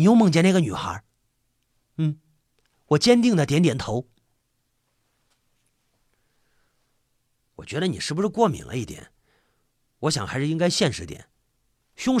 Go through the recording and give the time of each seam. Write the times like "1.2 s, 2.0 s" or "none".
none